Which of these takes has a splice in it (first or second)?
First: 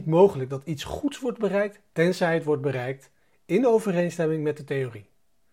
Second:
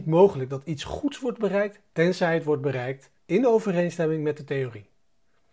second